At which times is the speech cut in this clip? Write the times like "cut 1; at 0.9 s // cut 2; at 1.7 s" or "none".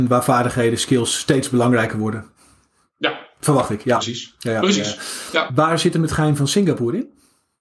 none